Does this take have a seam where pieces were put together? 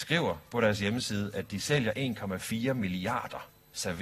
no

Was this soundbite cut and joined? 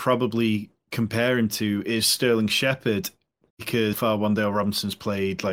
yes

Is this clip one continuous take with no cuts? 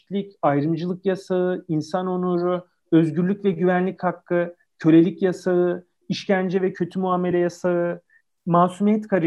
yes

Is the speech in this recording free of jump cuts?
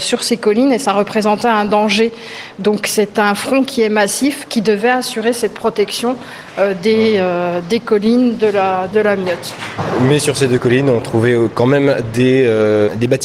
no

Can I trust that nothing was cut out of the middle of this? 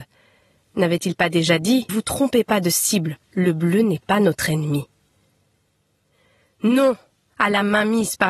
no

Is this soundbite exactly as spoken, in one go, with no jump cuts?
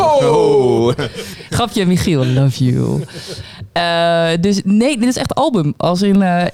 yes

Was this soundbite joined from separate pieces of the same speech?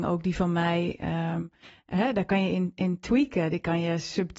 no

